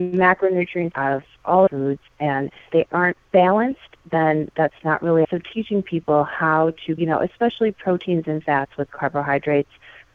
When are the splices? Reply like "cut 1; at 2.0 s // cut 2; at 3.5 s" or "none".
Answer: cut 1; at 0.9 s // cut 2; at 1.7 s // cut 3; at 2.7 s // cut 4; at 3.2 s // cut 5; at 5.2 s // cut 6; at 7.0 s